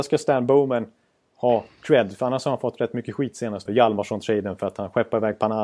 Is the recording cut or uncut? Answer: cut